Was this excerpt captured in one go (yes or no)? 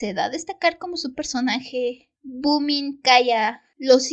no